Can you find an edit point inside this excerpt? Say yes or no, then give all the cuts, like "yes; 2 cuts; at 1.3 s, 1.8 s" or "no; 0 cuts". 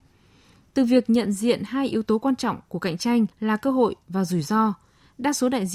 yes; 1 cut; at 3.3 s